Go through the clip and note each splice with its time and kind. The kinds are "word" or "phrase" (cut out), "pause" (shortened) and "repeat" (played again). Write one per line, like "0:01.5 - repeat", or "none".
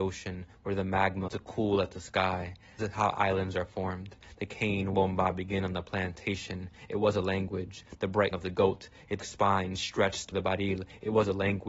0:01.3 - word
0:02.8 - word
0:04.9 - word
0:08.3 - word
0:09.2 - word
0:10.3 - word